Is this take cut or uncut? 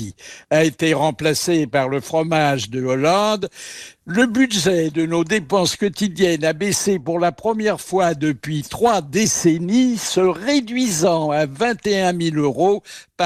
uncut